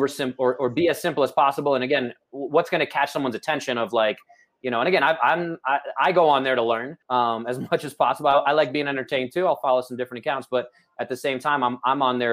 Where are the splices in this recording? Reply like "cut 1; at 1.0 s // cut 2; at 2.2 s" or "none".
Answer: cut 1; at 7.0 s